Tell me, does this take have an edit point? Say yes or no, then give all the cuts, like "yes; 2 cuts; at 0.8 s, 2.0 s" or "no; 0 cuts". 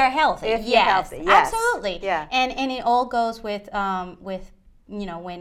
no; 0 cuts